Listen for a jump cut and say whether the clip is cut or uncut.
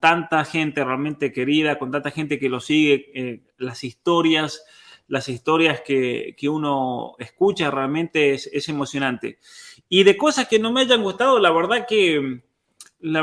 uncut